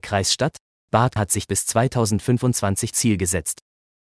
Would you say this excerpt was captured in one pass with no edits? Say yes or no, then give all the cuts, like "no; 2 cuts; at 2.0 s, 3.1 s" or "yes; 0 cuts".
no; 3 cuts; at 1.2 s, 1.5 s, 2.9 s